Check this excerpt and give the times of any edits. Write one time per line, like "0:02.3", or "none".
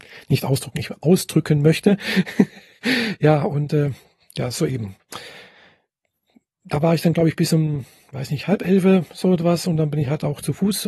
none